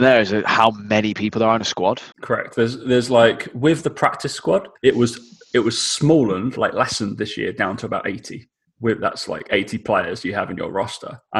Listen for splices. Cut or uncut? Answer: cut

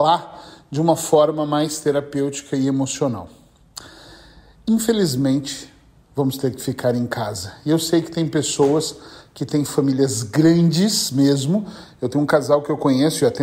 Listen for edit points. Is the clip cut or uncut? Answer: uncut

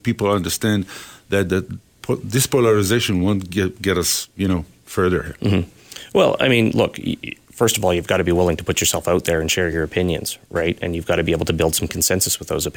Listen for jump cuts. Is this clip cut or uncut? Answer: uncut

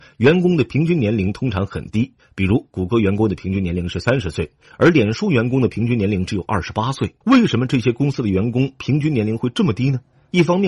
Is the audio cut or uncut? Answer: cut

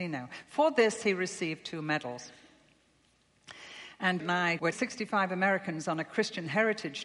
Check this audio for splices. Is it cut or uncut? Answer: cut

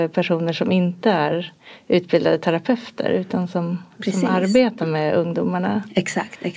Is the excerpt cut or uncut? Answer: uncut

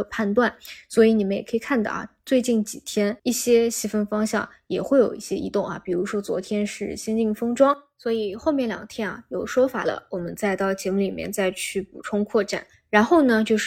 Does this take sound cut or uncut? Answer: cut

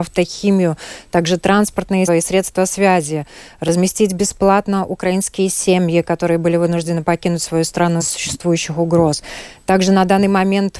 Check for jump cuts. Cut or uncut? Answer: cut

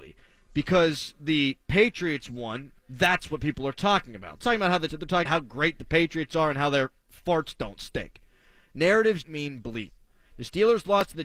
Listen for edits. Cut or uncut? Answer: cut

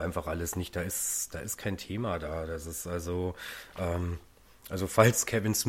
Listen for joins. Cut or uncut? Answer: uncut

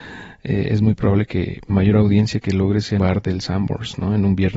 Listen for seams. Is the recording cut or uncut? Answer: cut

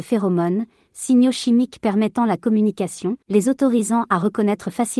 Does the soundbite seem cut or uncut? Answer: cut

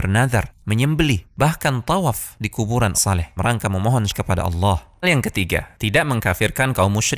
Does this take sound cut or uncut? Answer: cut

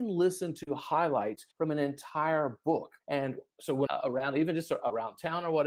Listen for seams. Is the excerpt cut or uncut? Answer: cut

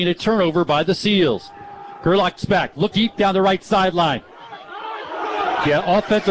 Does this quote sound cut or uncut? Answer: cut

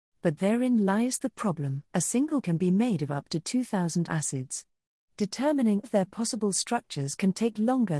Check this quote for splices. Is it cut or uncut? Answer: cut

